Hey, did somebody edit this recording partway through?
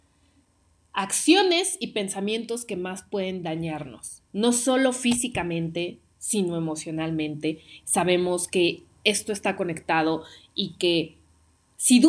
no; 0 cuts

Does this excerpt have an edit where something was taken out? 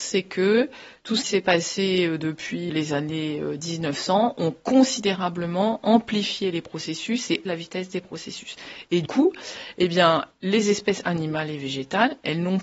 yes; 4 cuts; at 1.2 s, 2.7 s, 7.5 s, 9.1 s

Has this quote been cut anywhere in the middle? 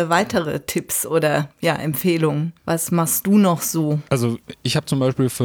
yes; 3 cuts; at 1.5 s, 2.6 s, 4.1 s

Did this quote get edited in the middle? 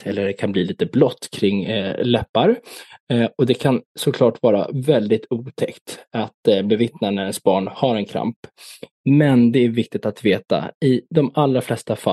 no; 0 cuts

